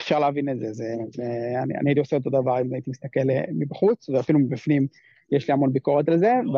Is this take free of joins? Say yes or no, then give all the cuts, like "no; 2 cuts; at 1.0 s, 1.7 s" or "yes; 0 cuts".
yes; 0 cuts